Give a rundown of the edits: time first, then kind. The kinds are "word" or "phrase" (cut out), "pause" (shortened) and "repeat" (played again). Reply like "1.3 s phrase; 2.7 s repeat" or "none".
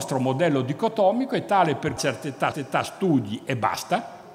2.0 s phrase; 2.5 s repeat